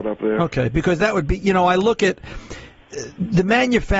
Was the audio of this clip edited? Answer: no; 0 cuts

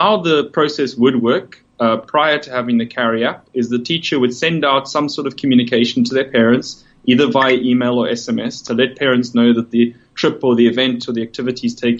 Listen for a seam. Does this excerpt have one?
no; 0 cuts

